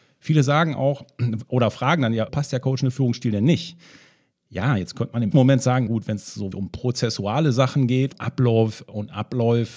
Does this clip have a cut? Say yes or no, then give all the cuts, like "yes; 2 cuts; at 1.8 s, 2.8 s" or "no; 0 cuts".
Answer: yes; 5 cuts; at 2.3 s, 5.3 s, 5.9 s, 6.5 s, 8.1 s